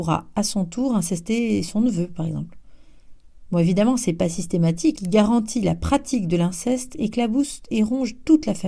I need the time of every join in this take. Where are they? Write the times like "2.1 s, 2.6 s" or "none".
4.9 s